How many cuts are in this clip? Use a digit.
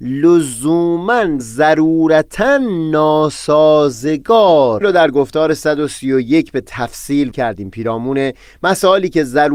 3